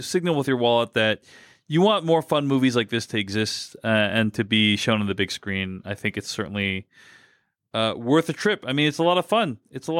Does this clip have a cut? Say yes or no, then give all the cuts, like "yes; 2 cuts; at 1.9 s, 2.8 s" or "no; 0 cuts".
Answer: no; 0 cuts